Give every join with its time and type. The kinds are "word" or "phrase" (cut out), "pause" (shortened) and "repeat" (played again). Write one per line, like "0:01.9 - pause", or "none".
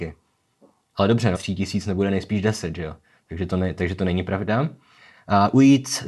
0:01.3 - word

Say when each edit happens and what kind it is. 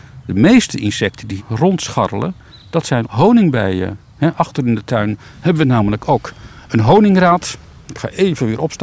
0:01.4 - word
0:03.0 - word

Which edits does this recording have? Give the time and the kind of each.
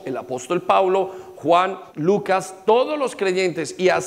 0:01.9 - pause

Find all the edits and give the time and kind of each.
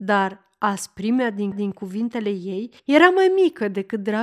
0:01.5 - repeat
0:02.8 - pause

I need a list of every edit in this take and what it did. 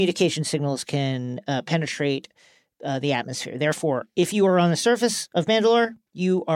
none

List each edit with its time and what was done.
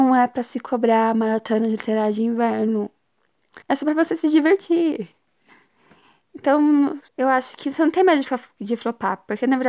0:03.6 - pause
0:07.1 - pause

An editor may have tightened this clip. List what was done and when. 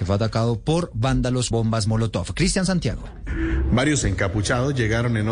0:01.5 - word
0:04.0 - word

